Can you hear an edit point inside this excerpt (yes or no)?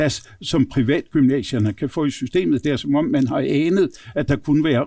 no